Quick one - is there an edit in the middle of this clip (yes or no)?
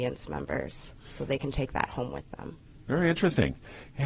no